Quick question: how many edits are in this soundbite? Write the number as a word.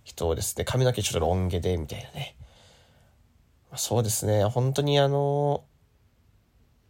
zero